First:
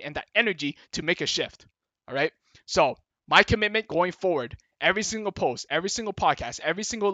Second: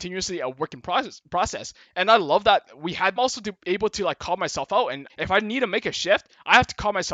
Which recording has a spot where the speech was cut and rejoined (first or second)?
second